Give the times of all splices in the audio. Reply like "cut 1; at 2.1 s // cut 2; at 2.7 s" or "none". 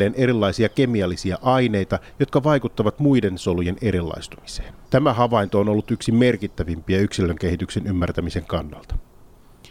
cut 1; at 4.9 s

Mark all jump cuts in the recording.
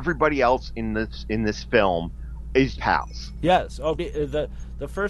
cut 1; at 2.8 s // cut 2; at 4.0 s

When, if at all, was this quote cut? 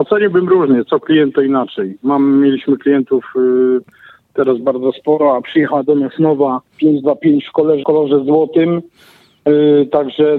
cut 1; at 6.7 s // cut 2; at 7.8 s

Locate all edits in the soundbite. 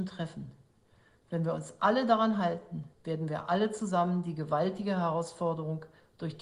cut 1; at 2.9 s

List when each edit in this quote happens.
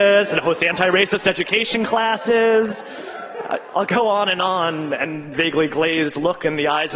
cut 1; at 5.3 s

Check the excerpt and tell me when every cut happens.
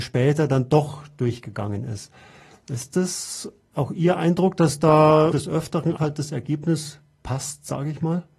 cut 1; at 5.3 s // cut 2; at 6.0 s

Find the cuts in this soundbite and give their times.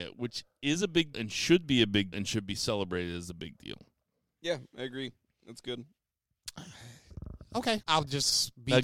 cut 1; at 1.1 s // cut 2; at 2.1 s // cut 3; at 7.8 s

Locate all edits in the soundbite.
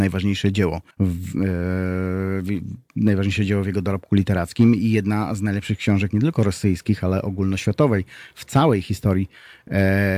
cut 1; at 0.9 s

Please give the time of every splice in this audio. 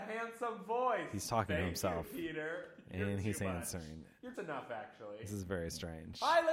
cut 1; at 4.3 s

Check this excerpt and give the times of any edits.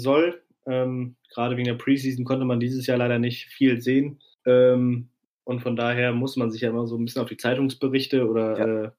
cut 1; at 1.2 s // cut 2; at 4.3 s

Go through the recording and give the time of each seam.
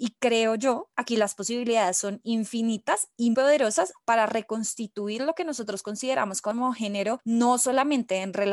cut 1; at 3.3 s

